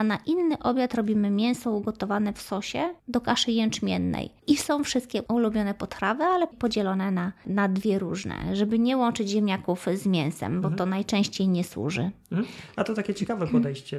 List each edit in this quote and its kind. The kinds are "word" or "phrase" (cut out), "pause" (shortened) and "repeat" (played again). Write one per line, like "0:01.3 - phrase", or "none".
0:03.0 - pause